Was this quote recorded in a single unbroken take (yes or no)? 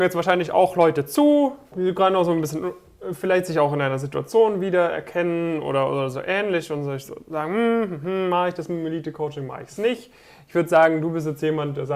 yes